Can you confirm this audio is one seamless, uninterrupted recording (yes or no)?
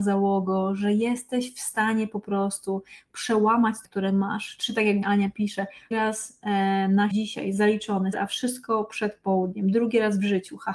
no